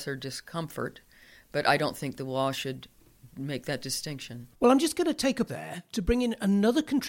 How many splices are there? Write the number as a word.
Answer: one